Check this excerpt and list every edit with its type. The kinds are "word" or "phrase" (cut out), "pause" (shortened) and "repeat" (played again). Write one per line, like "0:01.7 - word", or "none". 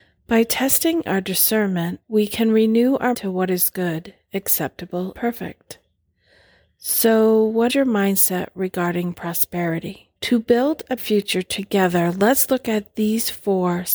0:01.1 - phrase
0:02.0 - pause
0:03.1 - word
0:05.1 - word
0:07.7 - word
0:10.2 - pause
0:11.0 - word